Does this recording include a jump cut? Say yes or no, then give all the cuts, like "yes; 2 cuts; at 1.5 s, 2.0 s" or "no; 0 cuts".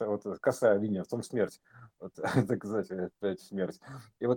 yes; 2 cuts; at 1.2 s, 2.1 s